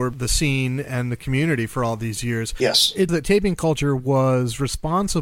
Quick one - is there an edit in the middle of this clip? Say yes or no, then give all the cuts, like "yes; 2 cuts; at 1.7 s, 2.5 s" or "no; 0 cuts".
yes; 1 cut; at 3.1 s